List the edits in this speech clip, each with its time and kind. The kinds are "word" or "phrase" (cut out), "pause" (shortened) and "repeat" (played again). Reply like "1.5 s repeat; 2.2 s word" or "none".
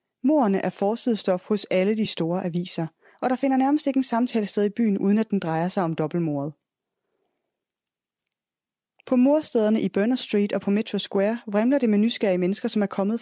none